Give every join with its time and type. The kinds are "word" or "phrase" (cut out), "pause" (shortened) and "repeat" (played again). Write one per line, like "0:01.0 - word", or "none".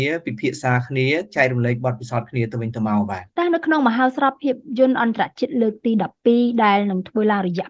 0:03.3 - pause